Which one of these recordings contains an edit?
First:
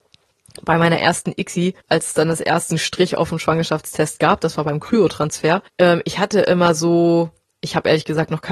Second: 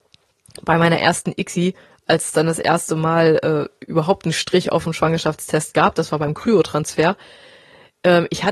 first; 3 cuts; at 1.8 s, 2.7 s, 5.7 s

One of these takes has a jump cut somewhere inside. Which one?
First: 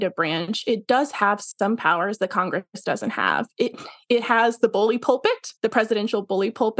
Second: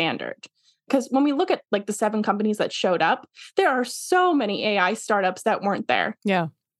first; 1 cut; at 5.6 s

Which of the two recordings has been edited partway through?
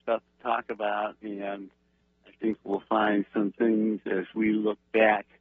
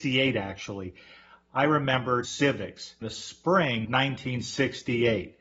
second; 3 cuts; at 2.2 s, 3.0 s, 3.8 s

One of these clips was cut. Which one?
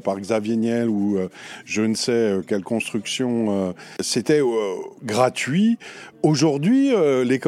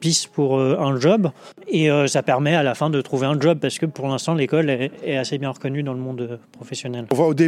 first; 1 cut; at 4.9 s

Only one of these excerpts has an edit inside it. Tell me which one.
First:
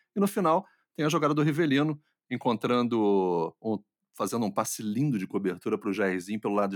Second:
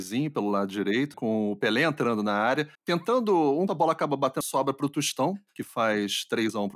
second; 4 cuts; at 1.1 s, 2.7 s, 3.7 s, 4.4 s

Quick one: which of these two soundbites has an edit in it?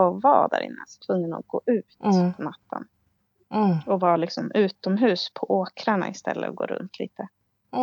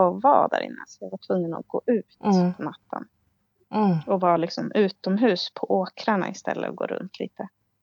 first; 1 cut; at 1.0 s

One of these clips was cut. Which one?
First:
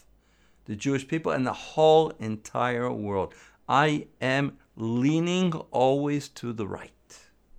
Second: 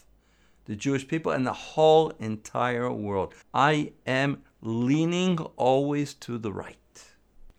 second; 1 cut; at 3.4 s

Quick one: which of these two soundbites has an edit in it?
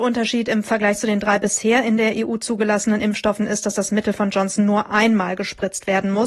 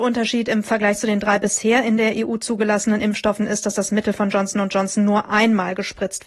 first; 1 cut; at 4.3 s

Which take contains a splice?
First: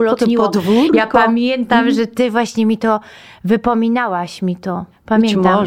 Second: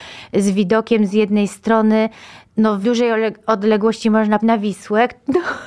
second; 2 cuts; at 2.8 s, 4.4 s

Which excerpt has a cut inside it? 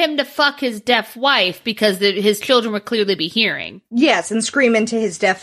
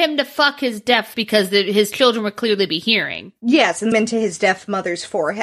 second; 2 cuts; at 1.1 s, 3.9 s

